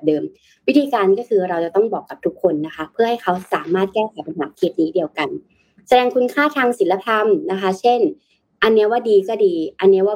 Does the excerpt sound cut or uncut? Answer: uncut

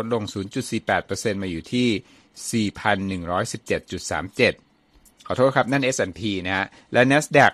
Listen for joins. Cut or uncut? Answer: uncut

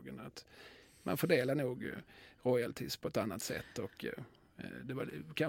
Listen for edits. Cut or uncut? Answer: uncut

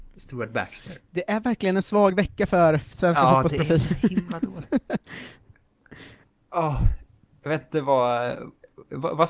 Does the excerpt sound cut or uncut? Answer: uncut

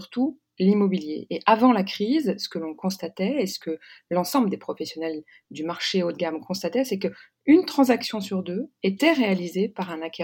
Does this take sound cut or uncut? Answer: uncut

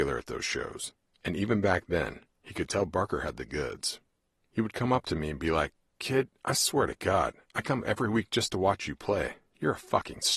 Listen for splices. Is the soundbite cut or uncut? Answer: uncut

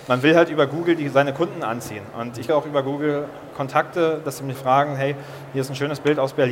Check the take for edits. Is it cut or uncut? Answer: cut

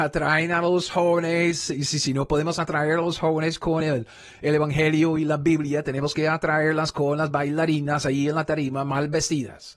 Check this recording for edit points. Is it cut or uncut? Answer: uncut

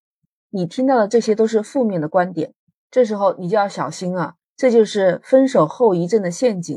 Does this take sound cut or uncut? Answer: uncut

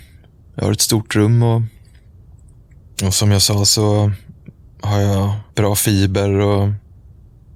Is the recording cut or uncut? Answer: cut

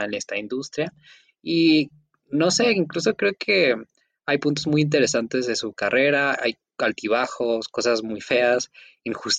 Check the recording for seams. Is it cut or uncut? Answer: uncut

